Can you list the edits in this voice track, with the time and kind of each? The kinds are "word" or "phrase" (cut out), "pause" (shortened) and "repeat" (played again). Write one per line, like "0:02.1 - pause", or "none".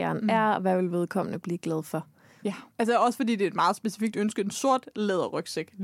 none